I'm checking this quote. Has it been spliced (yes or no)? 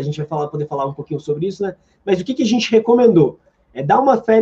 no